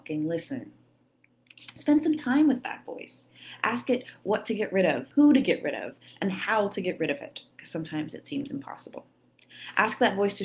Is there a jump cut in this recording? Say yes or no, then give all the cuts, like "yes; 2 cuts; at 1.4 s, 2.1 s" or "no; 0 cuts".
yes; 1 cut; at 5.1 s